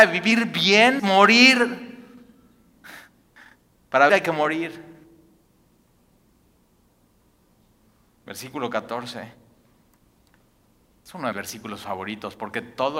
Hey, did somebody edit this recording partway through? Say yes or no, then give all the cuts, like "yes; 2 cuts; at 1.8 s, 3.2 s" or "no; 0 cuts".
yes; 3 cuts; at 1.0 s, 4.1 s, 11.3 s